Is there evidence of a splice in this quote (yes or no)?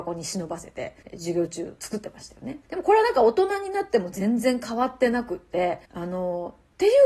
yes